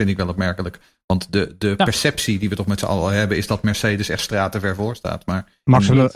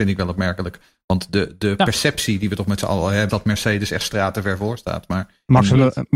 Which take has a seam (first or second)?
second